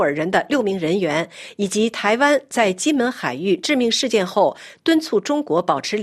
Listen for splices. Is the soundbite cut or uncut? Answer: uncut